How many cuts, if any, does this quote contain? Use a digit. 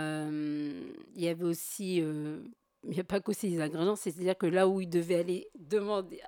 1